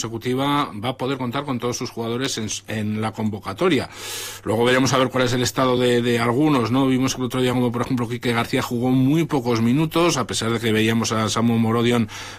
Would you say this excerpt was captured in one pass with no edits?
yes; 0 cuts

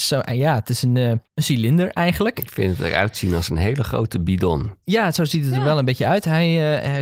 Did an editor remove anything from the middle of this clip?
yes; 1 cut; at 1.3 s

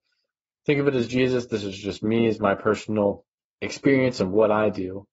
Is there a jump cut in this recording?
yes; 1 cut; at 3.3 s

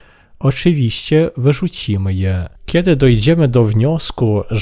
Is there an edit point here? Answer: yes; 1 cut; at 2.6 s

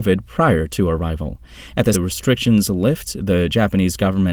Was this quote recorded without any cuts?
no; 1 cut; at 1.9 s

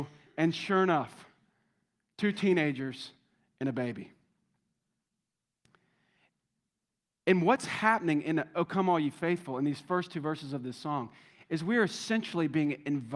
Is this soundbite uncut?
yes; 0 cuts

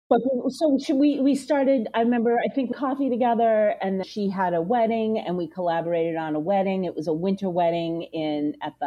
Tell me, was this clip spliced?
yes; 2 cuts; at 2.7 s, 4.0 s

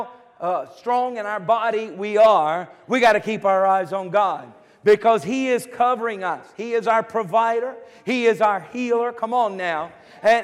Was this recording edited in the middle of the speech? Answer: no; 0 cuts

